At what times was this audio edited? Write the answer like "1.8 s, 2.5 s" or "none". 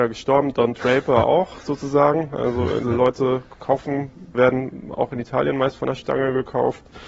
2.8 s, 4.3 s